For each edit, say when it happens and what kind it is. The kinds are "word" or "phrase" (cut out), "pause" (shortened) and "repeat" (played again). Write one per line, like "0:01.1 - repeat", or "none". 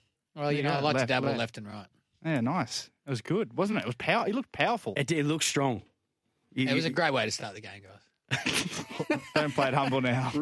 none